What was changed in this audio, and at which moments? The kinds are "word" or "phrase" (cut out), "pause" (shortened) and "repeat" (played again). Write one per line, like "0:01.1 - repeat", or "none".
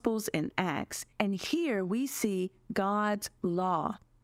0:01.1 - pause